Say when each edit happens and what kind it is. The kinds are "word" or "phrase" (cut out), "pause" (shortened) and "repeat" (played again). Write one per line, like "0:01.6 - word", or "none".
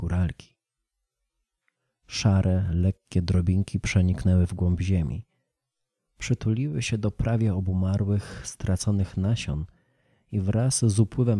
none